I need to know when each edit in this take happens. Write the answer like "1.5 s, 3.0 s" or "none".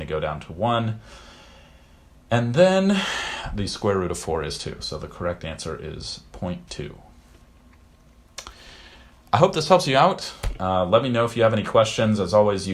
none